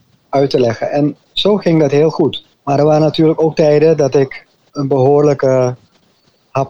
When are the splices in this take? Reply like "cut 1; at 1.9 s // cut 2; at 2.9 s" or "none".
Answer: cut 1; at 2.5 s